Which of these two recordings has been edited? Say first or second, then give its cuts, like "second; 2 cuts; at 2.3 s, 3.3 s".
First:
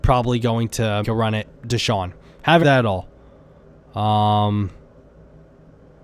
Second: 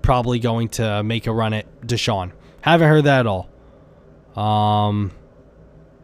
first; 2 cuts; at 1.0 s, 2.6 s